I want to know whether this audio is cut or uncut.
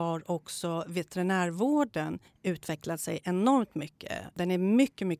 cut